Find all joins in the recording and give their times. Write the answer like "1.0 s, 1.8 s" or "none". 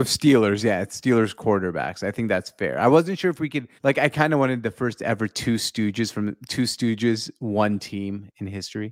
3.8 s